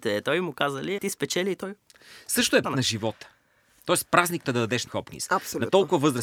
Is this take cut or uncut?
cut